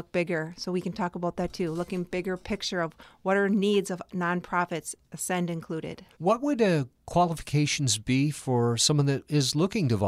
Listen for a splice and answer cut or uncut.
cut